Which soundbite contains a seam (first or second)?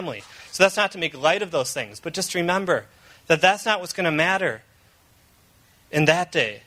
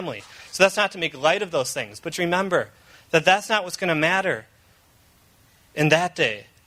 second